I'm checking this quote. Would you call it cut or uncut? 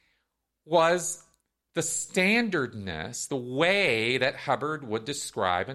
uncut